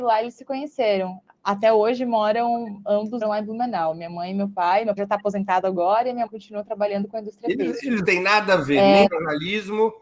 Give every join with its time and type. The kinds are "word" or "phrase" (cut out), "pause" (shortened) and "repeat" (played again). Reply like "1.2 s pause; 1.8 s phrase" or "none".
3.2 s word; 5.0 s word; 6.3 s word; 8.0 s word; 9.1 s word